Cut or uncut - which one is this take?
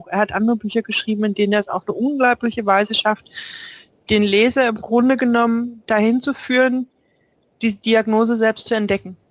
uncut